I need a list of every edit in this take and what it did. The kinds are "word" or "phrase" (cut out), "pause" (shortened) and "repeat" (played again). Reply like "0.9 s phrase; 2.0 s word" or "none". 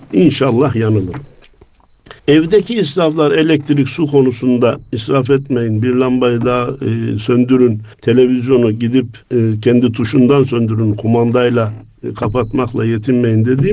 2.2 s pause; 7.9 s pause; 9.2 s pause